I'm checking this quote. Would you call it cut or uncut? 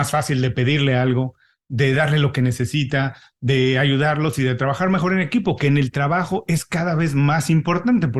uncut